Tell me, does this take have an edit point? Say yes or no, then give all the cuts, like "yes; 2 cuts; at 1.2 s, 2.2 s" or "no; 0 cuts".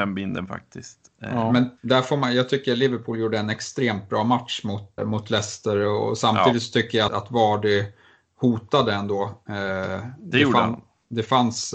yes; 3 cuts; at 1.8 s, 5.0 s, 7.1 s